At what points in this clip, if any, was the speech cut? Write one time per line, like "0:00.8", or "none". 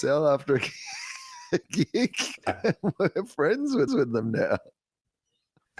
0:02.4
0:03.9